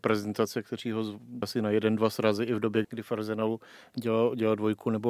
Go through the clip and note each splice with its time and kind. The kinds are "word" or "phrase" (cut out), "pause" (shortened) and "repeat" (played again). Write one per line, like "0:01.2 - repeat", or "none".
0:01.4 - word
0:02.8 - word